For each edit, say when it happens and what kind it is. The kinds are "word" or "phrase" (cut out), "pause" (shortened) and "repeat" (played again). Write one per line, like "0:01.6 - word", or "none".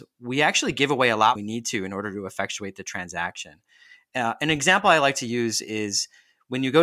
0:01.4 - phrase